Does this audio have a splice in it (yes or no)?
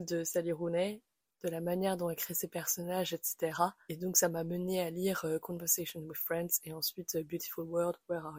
no